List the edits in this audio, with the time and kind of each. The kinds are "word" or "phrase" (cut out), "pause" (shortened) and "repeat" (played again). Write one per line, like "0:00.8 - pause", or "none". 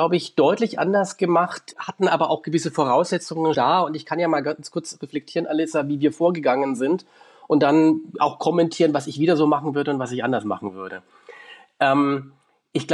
0:01.7 - word
0:03.5 - word